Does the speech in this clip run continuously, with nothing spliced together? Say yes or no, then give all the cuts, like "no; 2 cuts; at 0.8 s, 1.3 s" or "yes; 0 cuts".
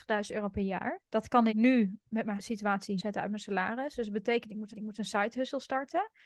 no; 5 cuts; at 1.1 s, 1.5 s, 2.4 s, 3.0 s, 4.7 s